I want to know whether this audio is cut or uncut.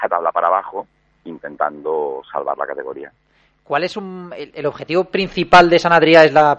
uncut